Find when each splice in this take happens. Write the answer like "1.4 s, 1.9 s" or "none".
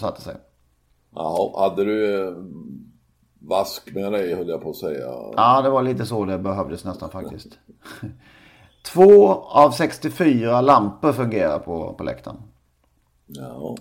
none

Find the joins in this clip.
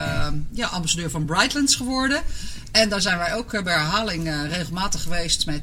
none

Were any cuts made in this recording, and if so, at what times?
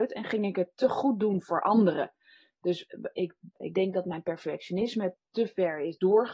none

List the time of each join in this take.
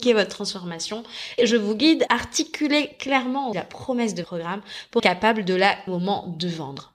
1.4 s, 2.1 s, 3.5 s, 4.2 s, 5.0 s, 5.9 s

